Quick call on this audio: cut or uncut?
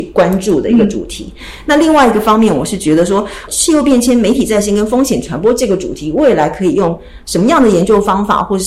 cut